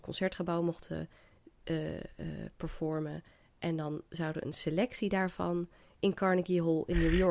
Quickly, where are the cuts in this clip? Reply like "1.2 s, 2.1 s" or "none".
none